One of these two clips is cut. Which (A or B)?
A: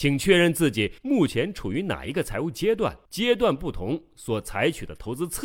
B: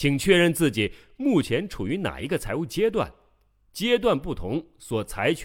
A